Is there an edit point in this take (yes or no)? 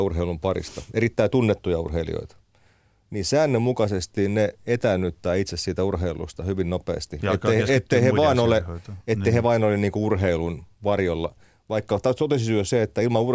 no